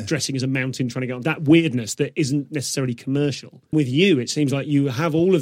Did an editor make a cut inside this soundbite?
yes; 2 cuts; at 1.2 s, 3.7 s

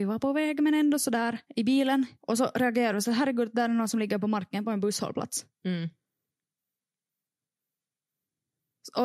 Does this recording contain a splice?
yes; 2 cuts; at 1.4 s, 2.2 s

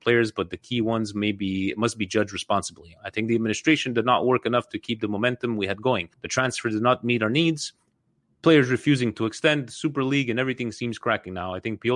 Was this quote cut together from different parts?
yes; 1 cut; at 6.1 s

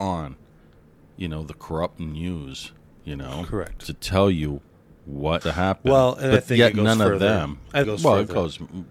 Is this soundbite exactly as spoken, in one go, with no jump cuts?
no; 2 cuts; at 5.4 s, 7.8 s

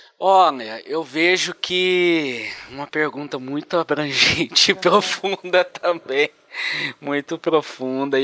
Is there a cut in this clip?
no; 0 cuts

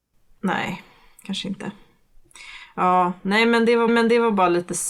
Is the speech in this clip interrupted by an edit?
yes; 1 cut; at 3.9 s

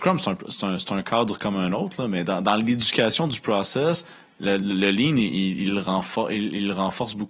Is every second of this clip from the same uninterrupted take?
yes; 0 cuts

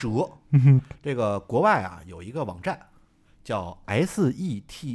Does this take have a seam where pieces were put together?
no; 0 cuts

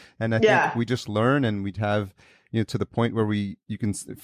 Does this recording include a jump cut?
no; 0 cuts

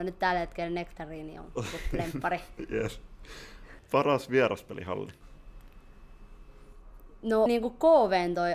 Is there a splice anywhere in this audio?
yes; 1 cut; at 7.5 s

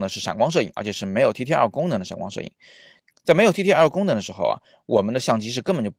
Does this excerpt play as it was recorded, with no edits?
yes; 0 cuts

